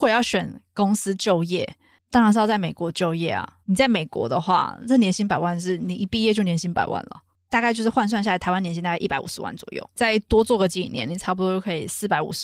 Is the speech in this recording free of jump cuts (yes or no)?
no